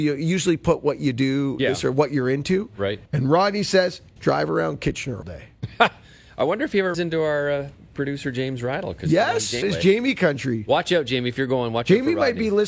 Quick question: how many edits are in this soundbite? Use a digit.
6